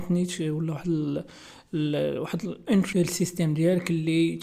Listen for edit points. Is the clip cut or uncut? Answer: cut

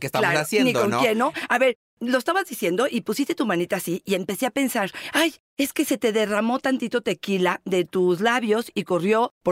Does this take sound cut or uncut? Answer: uncut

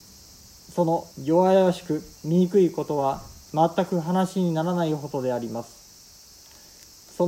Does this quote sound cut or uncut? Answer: cut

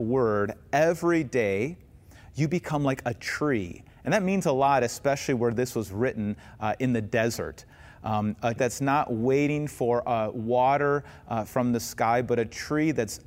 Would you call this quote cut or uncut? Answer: cut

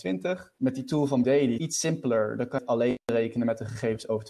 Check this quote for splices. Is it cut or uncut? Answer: cut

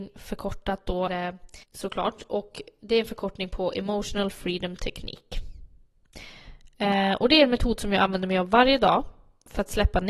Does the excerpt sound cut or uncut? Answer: cut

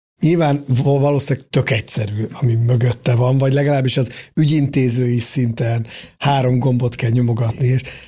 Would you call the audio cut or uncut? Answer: uncut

